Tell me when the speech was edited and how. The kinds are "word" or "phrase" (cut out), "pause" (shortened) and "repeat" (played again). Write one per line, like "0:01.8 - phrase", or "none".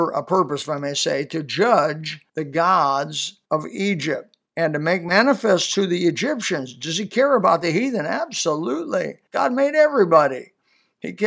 0:02.3 - pause
0:03.4 - pause
0:04.5 - pause
0:09.3 - pause